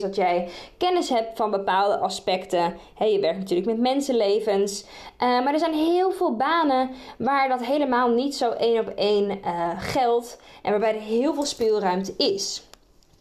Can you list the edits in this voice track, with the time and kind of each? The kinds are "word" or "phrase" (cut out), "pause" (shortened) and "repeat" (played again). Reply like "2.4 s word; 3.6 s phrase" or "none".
none